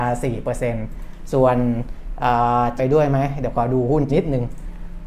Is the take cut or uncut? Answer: cut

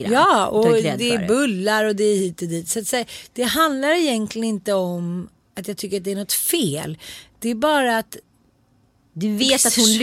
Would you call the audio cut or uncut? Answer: uncut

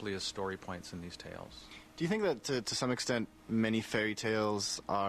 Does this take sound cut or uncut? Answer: cut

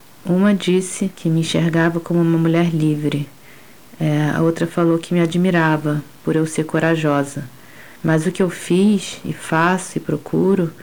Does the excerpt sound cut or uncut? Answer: cut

